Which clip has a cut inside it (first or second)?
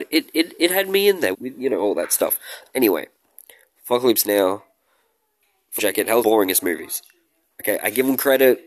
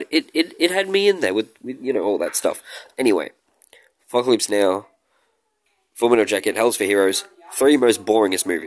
first